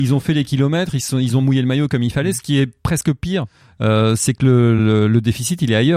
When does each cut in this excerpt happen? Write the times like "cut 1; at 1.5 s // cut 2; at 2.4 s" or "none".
none

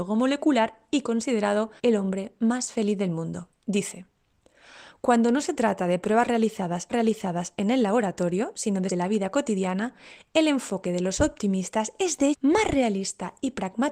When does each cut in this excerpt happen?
cut 1; at 1.8 s // cut 2; at 6.9 s // cut 3; at 8.9 s // cut 4; at 12.3 s

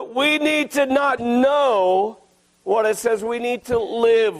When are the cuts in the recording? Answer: cut 1; at 1.2 s

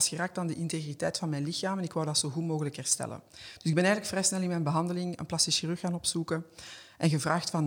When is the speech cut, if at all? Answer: none

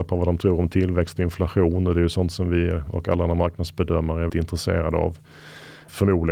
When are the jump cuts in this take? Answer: cut 1; at 4.3 s

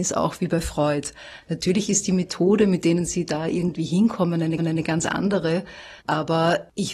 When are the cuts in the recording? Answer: cut 1; at 4.6 s // cut 2; at 6.0 s

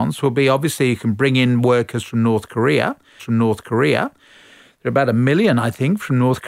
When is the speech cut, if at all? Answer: cut 1; at 3.2 s

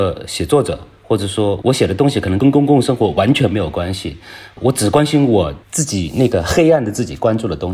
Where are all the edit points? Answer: cut 1; at 5.6 s

